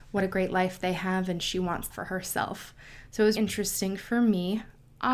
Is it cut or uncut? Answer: cut